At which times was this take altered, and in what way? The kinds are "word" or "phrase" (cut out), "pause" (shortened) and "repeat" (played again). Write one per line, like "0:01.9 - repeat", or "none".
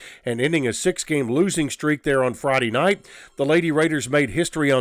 none